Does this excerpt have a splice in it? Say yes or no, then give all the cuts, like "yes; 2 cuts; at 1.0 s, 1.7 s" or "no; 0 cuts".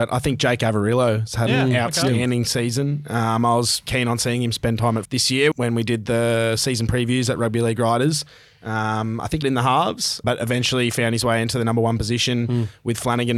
yes; 5 cuts; at 3.9 s, 5.0 s, 5.5 s, 9.4 s, 10.2 s